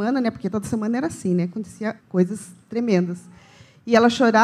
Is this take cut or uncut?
cut